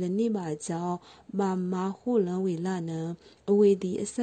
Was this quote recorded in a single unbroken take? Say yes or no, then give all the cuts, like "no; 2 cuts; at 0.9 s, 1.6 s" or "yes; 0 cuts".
yes; 0 cuts